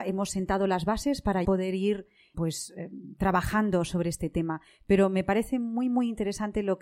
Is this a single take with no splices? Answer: no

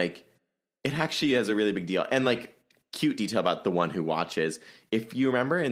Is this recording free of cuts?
yes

